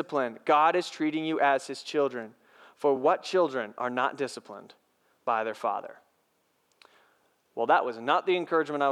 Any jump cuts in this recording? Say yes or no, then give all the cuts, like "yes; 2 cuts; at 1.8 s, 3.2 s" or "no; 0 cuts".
no; 0 cuts